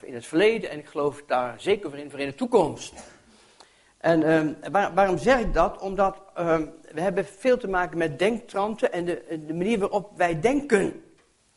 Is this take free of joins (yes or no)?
yes